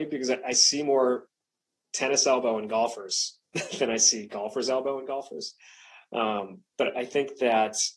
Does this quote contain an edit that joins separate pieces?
no; 0 cuts

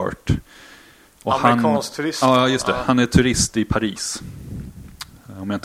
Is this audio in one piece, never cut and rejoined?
yes; 0 cuts

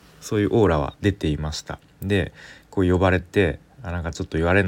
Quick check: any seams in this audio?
yes; 1 cut; at 2.6 s

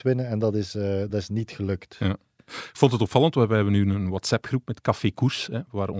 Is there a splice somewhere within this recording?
no; 0 cuts

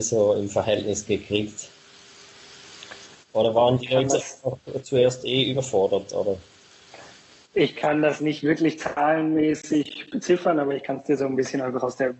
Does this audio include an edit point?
no; 0 cuts

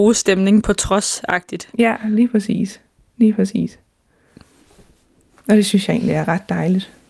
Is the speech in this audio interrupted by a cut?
no; 0 cuts

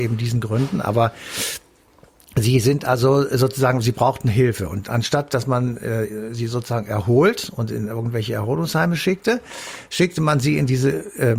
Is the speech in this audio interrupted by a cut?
no; 0 cuts

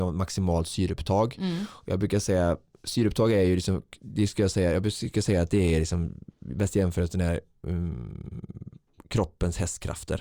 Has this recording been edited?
no; 0 cuts

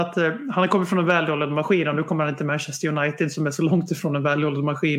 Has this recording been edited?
no; 0 cuts

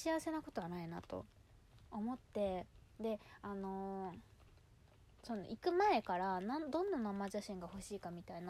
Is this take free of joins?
yes; 0 cuts

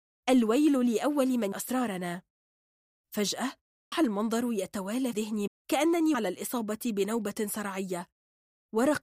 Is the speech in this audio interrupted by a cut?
yes; 5 cuts; at 1.5 s, 3.9 s, 5.1 s, 5.5 s, 6.1 s

